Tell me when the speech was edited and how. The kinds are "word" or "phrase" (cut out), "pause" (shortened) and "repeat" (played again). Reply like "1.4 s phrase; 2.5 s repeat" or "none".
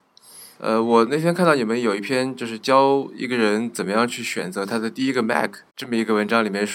none